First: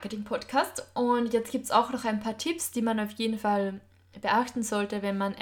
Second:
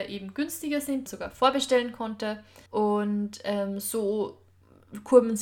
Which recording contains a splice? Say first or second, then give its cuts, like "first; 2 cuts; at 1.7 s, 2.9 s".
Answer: second; 2 cuts; at 1.1 s, 2.7 s